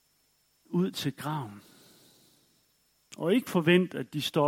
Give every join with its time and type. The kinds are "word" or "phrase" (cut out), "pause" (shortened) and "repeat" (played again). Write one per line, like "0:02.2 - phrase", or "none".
none